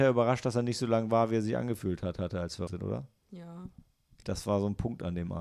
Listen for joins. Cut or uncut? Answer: cut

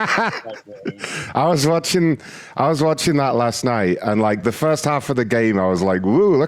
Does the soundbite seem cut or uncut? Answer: uncut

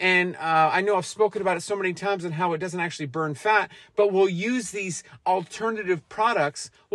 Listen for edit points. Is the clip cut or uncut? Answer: uncut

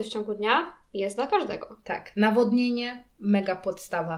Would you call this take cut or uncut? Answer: uncut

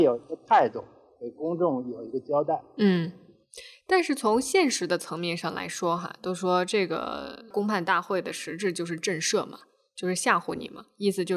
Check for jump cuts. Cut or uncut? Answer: uncut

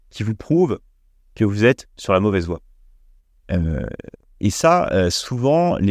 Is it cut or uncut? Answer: uncut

